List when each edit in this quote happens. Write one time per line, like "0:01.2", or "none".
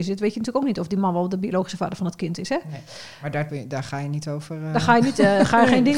0:03.5